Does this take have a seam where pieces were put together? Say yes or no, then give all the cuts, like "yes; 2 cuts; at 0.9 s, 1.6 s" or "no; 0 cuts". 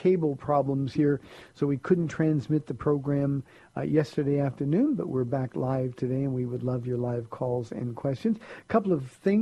no; 0 cuts